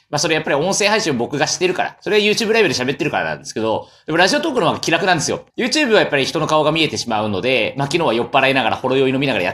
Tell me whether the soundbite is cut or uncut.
cut